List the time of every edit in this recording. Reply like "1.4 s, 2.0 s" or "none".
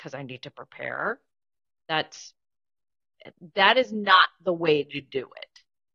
none